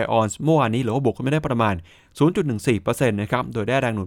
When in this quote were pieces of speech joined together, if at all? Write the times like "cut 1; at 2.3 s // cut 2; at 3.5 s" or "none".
none